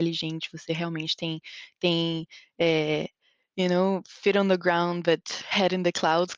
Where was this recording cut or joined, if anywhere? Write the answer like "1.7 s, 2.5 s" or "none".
none